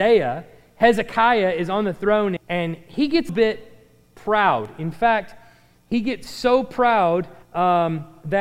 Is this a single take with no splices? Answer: no; 3 cuts; at 2.4 s, 3.3 s, 7.4 s

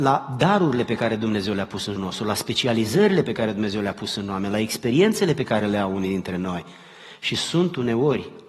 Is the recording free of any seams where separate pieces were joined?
no; 1 cut; at 2.0 s

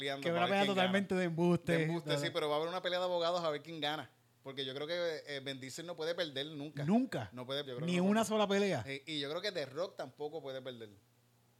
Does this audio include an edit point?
yes; 1 cut; at 7.6 s

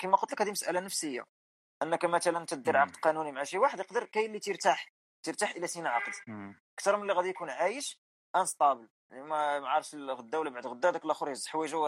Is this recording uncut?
yes; 0 cuts

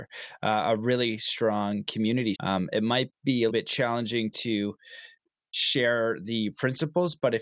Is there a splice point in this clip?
yes; 2 cuts; at 2.3 s, 3.5 s

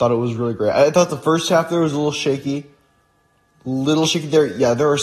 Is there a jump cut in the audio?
no; 0 cuts

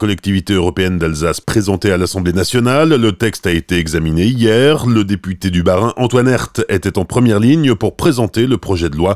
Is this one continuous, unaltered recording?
yes; 0 cuts

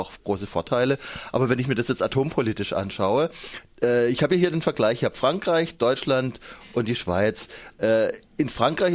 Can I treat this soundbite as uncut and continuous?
yes; 0 cuts

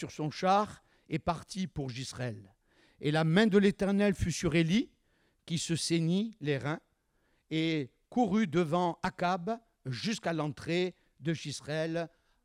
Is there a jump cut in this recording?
no; 0 cuts

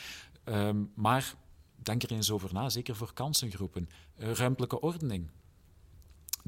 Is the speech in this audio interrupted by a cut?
no; 0 cuts

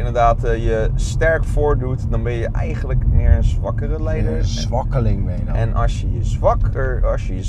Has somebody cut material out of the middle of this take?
no; 0 cuts

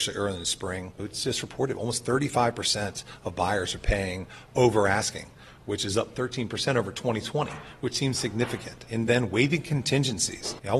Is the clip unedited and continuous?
yes; 0 cuts

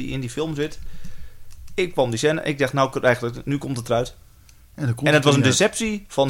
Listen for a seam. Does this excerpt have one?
no; 0 cuts

